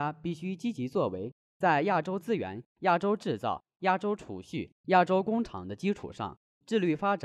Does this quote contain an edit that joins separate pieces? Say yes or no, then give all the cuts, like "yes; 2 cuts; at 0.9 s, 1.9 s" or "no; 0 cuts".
yes; 1 cut; at 4.8 s